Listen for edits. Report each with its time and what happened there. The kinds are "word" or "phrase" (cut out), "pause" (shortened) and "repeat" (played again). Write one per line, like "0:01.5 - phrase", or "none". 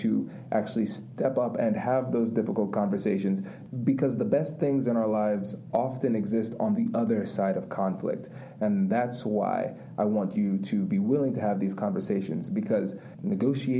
none